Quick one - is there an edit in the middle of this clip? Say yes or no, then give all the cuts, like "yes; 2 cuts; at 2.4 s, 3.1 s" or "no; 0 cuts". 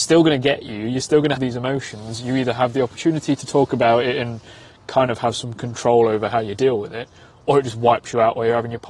yes; 1 cut; at 1.4 s